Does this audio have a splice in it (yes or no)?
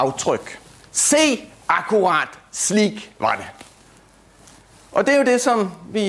no